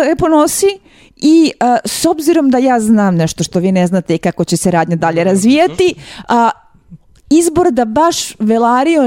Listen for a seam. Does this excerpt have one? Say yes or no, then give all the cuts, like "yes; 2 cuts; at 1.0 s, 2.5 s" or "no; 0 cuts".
no; 0 cuts